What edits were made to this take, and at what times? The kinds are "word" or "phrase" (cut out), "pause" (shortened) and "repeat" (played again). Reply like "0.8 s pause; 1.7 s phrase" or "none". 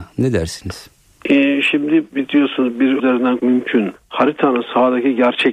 2.1 s word; 3.0 s word; 3.4 s word; 3.9 s word